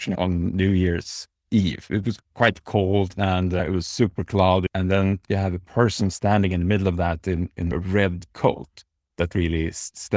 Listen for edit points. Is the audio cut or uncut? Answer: uncut